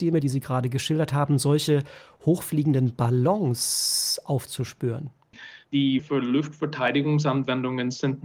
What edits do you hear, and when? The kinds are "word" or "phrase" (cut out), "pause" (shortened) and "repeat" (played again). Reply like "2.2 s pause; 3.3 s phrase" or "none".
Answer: 6.0 s word